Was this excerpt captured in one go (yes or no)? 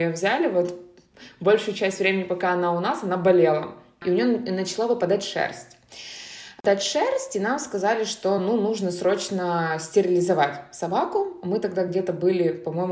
yes